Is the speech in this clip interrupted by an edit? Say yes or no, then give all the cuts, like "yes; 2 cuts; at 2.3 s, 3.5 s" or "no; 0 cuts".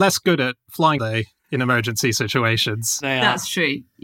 yes; 1 cut; at 1.0 s